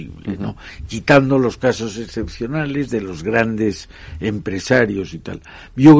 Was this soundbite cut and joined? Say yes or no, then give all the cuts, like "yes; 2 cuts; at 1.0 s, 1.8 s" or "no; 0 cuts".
no; 0 cuts